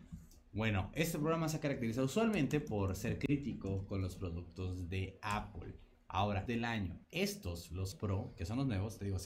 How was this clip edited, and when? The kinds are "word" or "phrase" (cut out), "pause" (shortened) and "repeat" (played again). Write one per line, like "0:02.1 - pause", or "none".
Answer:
0:06.5 - word
0:07.0 - pause
0:07.9 - word